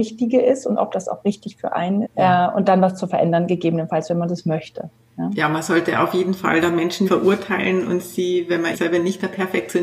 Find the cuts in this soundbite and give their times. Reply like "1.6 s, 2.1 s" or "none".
2.0 s, 7.1 s, 8.7 s